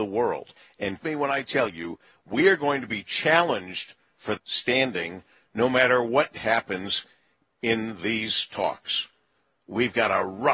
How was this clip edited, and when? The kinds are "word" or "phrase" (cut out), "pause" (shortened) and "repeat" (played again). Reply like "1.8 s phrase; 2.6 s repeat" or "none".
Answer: 1.0 s word; 4.4 s word